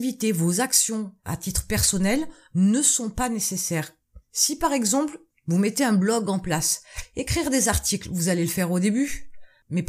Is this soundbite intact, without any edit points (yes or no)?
no